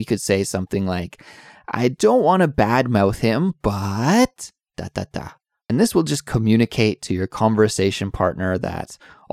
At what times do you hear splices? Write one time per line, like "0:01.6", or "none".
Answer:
none